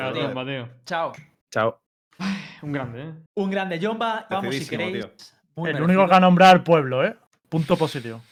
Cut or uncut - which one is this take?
cut